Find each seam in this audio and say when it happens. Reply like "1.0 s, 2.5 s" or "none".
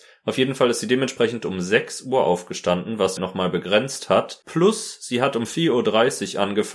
3.2 s